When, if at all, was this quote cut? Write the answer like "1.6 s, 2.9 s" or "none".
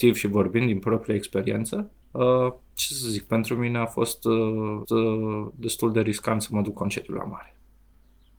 2.0 s, 4.8 s, 6.7 s